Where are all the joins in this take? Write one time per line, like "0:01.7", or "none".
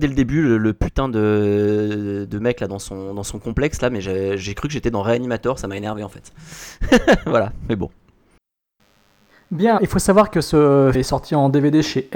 0:09.8
0:10.9